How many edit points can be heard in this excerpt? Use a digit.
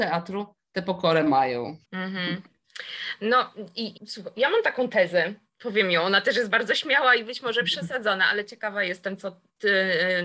2